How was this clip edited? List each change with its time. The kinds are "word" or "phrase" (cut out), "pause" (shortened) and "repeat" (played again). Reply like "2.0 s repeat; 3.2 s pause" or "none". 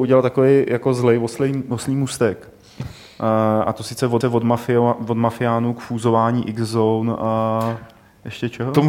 4.2 s repeat

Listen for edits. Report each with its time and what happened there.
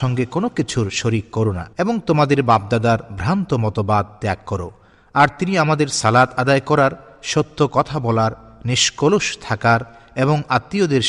1.7 s pause

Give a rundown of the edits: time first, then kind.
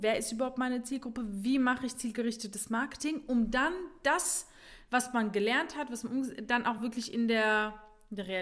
none

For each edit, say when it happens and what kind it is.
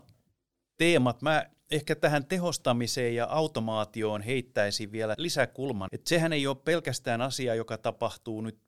5.1 s word; 5.9 s word

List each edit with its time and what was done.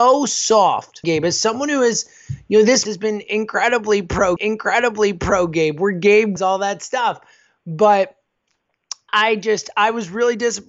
1.0 s word; 2.9 s word; 4.4 s repeat; 6.4 s word; 9.1 s word

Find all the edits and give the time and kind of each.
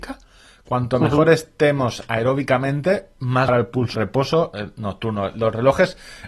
3.5 s word; 3.9 s word

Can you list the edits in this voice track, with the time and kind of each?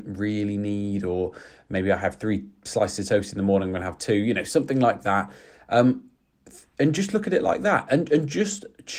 none

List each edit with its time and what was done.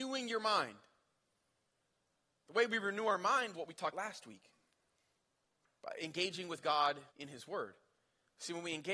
3.5 s word; 3.9 s word; 7.1 s pause

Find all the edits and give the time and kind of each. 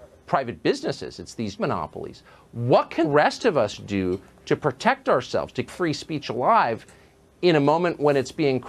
1.6 s phrase; 3.0 s word; 5.7 s word

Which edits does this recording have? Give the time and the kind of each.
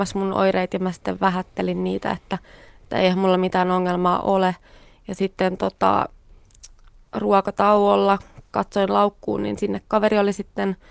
none

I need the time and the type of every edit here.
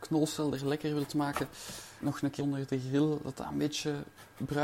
2.0 s word; 2.4 s word

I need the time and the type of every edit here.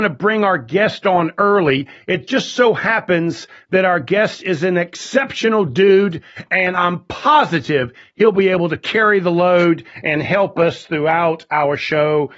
none

